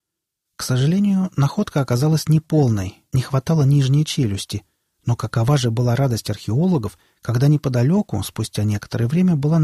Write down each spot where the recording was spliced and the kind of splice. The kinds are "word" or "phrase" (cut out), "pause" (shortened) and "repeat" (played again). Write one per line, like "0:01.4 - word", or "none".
none